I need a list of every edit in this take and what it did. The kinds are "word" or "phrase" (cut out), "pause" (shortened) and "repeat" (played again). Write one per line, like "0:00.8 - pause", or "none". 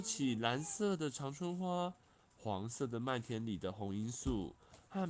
none